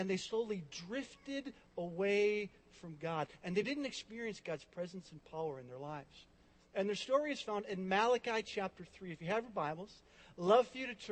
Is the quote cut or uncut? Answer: uncut